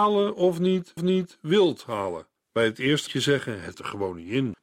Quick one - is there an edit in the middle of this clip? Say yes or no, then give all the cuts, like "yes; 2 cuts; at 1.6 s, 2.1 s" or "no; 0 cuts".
yes; 4 cuts; at 1.0 s, 2.4 s, 3.1 s, 3.7 s